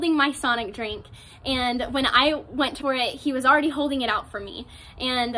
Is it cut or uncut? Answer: cut